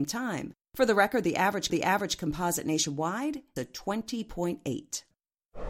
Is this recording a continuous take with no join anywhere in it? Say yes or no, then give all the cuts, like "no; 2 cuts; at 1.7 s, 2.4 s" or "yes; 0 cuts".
no; 2 cuts; at 1.7 s, 3.6 s